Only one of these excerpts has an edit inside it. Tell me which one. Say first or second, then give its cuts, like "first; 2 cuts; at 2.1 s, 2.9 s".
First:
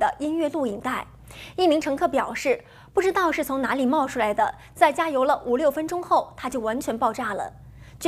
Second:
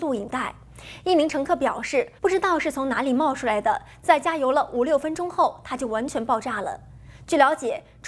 second; 1 cut; at 2.2 s